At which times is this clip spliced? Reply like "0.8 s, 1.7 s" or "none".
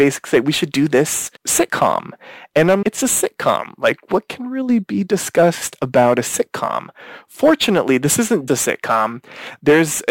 1.4 s, 2.8 s, 8.5 s